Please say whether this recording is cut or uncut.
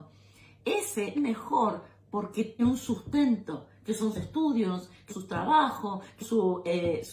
cut